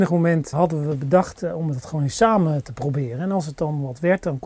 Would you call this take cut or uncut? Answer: uncut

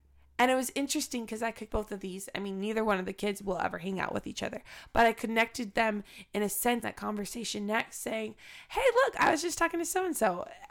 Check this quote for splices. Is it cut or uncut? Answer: cut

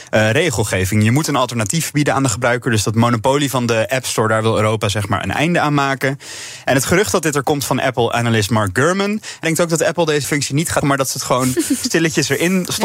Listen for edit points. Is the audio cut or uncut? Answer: cut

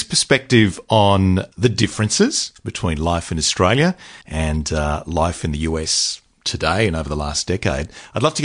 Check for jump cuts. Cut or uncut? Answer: cut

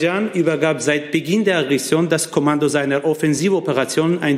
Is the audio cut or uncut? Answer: uncut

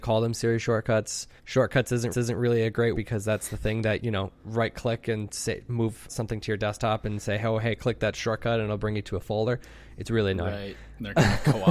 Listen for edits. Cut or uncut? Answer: cut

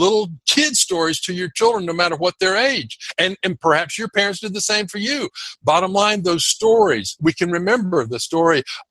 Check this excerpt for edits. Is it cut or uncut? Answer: uncut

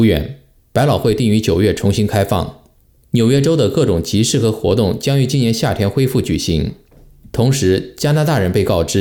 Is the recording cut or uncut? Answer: uncut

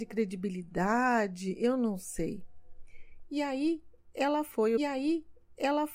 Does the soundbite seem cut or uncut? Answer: cut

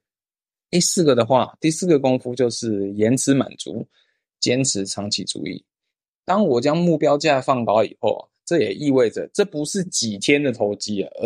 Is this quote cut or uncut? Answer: uncut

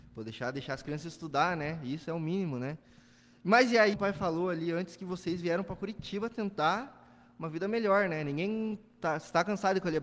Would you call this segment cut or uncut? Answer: cut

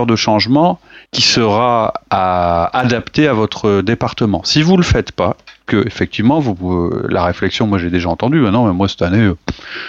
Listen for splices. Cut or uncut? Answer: cut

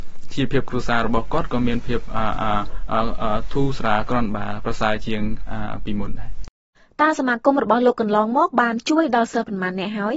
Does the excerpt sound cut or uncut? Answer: cut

